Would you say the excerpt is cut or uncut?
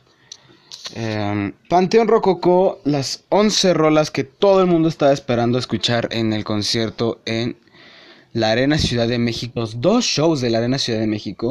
cut